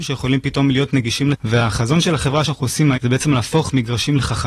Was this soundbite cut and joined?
yes; 3 cuts; at 1.3 s, 2.4 s, 2.9 s

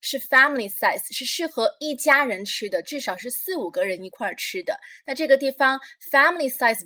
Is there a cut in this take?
no; 0 cuts

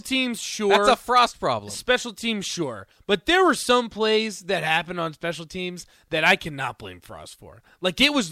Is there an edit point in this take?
no; 0 cuts

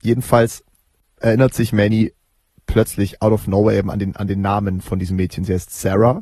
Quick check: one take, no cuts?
yes; 0 cuts

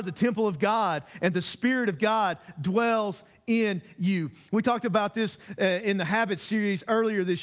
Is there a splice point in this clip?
no; 0 cuts

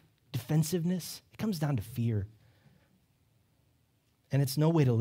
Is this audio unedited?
yes; 0 cuts

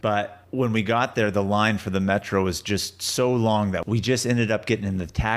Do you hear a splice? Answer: no; 0 cuts

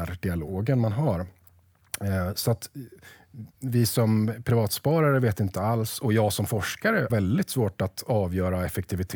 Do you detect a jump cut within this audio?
yes; 2 cuts; at 3.5 s, 7.1 s

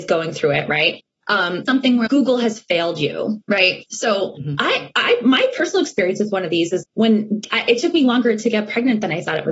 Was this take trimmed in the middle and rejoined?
yes; 3 cuts; at 1.7 s, 2.1 s, 6.8 s

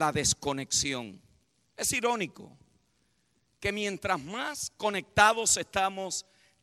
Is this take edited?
no; 0 cuts

